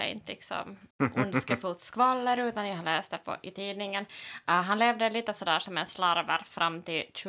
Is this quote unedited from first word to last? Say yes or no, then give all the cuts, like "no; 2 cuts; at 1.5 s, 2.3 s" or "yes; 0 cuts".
no; 1 cut; at 0.9 s